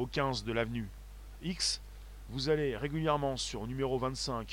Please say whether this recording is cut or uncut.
cut